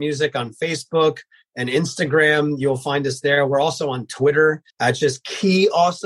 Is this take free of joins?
no; 1 cut; at 4.7 s

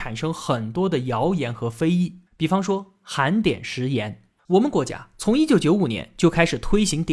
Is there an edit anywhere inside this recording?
yes; 2 cuts; at 2.3 s, 4.4 s

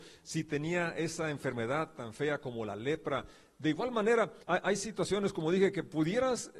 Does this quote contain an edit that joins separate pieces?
yes; 1 cut; at 4.4 s

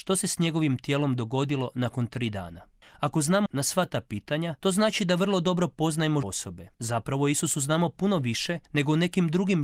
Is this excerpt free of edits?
no; 6 cuts; at 2.8 s, 3.5 s, 4.6 s, 6.2 s, 6.7 s, 8.6 s

